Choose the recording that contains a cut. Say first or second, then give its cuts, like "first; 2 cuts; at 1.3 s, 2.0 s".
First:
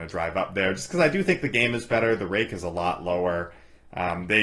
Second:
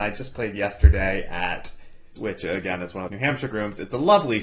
second; 3 cuts; at 2.2 s, 3.1 s, 3.5 s